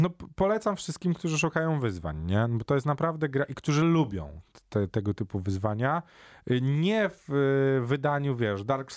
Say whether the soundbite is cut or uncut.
uncut